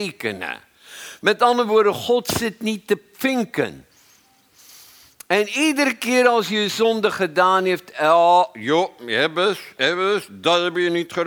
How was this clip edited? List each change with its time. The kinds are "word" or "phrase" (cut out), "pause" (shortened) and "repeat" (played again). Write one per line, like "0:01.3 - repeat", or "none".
none